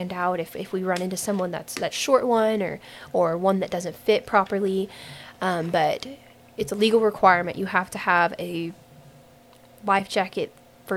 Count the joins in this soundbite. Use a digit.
0